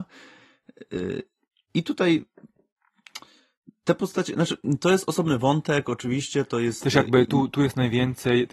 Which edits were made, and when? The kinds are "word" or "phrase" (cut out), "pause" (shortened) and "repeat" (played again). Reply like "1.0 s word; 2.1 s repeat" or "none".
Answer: none